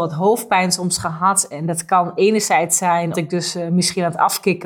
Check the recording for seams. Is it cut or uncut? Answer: cut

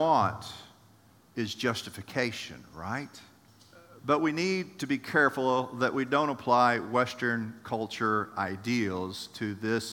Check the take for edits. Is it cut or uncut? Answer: cut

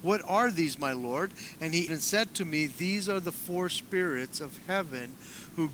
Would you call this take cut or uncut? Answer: cut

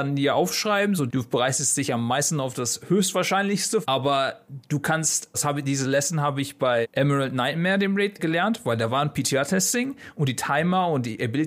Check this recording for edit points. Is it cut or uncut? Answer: cut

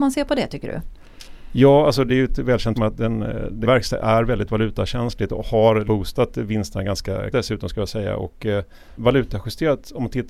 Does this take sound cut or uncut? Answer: cut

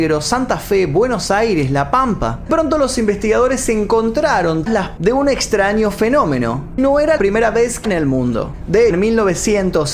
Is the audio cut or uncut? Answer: cut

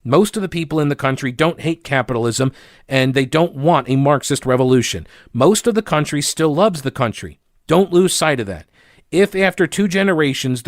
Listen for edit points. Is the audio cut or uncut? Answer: uncut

